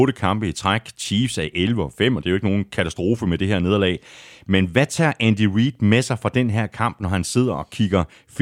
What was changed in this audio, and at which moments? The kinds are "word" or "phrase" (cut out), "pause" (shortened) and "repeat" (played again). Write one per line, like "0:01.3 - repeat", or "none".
none

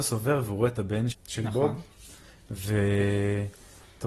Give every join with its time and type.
0:01.1 - word

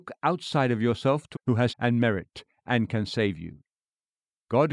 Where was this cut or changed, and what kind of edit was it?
0:01.3 - word
0:01.7 - word

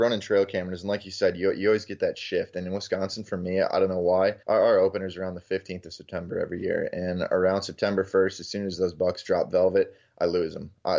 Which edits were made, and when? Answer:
0:04.4 - pause

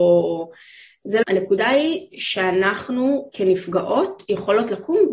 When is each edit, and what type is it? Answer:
0:01.2 - word

